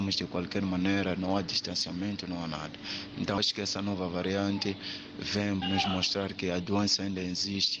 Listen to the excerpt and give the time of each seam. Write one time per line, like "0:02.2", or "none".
0:03.4
0:05.6